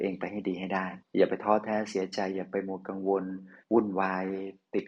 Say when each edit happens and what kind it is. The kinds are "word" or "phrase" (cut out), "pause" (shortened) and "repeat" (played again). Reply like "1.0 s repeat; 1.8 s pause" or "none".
1.0 s pause; 3.6 s pause